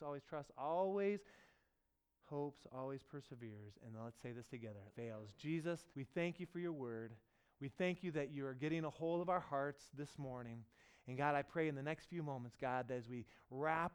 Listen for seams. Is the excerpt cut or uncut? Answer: cut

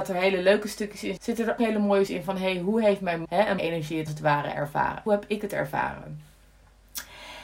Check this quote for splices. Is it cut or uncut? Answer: cut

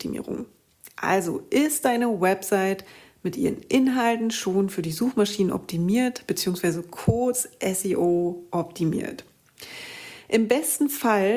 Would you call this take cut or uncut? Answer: uncut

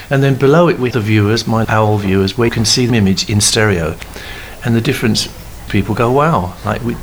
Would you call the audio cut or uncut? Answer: cut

